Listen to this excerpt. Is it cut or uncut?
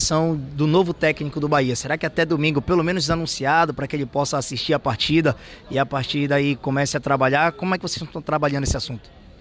uncut